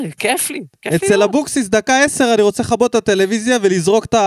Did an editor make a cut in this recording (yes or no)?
no